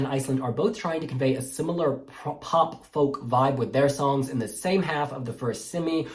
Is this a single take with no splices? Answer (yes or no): yes